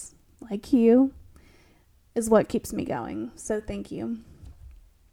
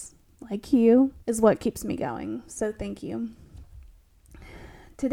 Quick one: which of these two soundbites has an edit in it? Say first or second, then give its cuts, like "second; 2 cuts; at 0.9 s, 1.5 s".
second; 1 cut; at 1.2 s